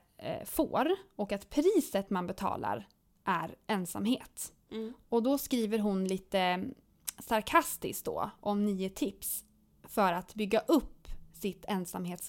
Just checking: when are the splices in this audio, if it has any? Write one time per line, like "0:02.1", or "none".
none

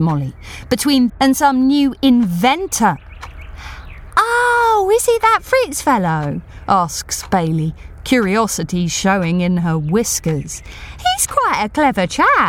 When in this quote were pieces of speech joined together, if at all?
0:01.1

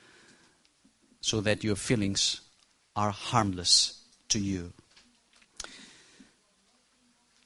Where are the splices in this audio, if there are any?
none

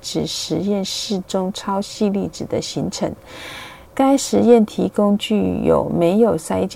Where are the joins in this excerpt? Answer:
0:03.9

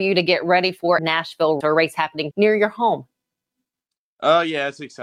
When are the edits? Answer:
0:01.0
0:01.6
0:02.3

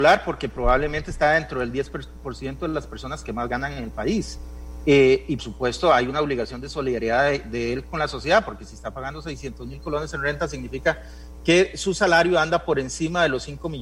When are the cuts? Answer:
0:05.4

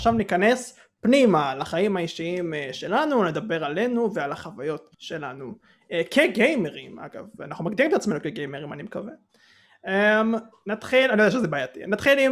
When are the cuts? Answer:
0:04.9

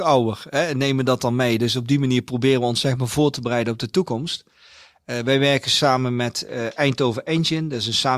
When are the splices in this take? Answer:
none

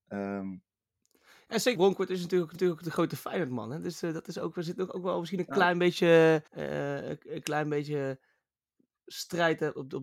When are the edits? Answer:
0:01.7
0:02.5
0:06.5

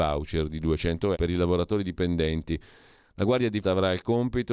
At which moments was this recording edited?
0:01.1
0:03.6

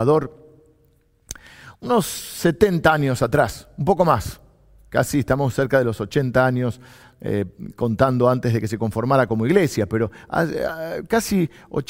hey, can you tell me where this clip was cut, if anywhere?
none

